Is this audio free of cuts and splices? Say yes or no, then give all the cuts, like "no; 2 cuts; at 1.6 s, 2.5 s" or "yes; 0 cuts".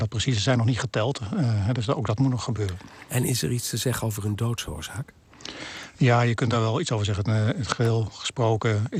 yes; 0 cuts